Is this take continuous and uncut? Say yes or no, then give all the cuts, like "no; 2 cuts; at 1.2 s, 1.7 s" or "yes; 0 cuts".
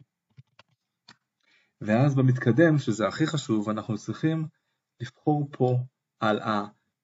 yes; 0 cuts